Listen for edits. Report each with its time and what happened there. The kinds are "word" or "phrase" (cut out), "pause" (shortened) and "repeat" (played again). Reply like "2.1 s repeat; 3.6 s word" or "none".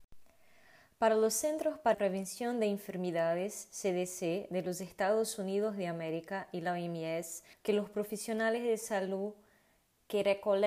1.9 s phrase; 7.5 s phrase